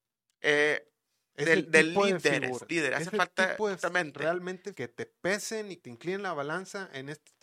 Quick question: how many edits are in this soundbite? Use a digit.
4